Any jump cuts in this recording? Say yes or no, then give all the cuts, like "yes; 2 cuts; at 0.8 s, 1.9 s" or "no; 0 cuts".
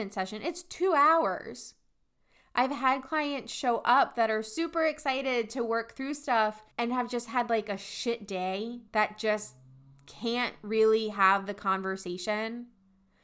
yes; 2 cuts; at 6.7 s, 8.9 s